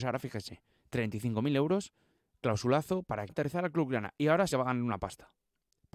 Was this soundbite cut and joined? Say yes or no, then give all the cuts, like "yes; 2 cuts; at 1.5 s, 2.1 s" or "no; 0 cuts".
yes; 3 cuts; at 2.1 s, 3.3 s, 4.5 s